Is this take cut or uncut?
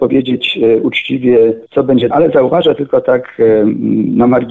cut